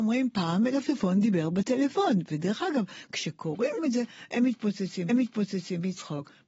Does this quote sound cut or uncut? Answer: cut